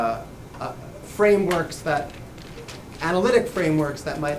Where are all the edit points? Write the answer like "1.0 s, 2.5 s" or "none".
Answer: 1.0 s